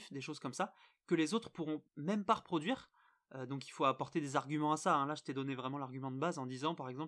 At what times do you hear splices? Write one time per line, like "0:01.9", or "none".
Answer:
0:01.9